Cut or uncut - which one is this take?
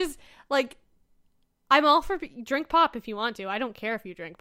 uncut